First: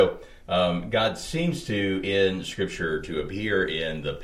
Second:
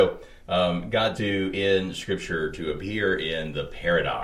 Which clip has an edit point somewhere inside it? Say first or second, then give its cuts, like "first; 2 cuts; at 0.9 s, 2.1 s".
second; 1 cut; at 1.2 s